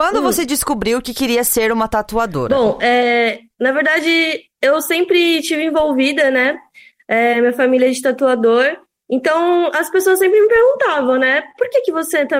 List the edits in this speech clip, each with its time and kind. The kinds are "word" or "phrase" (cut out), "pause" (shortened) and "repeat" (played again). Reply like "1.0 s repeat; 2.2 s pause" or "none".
none